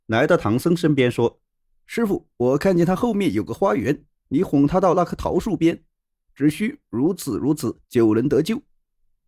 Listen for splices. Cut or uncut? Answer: cut